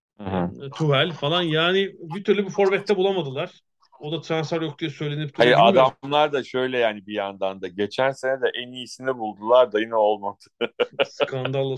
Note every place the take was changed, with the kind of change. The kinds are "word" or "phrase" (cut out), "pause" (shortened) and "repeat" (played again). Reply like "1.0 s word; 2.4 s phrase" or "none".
none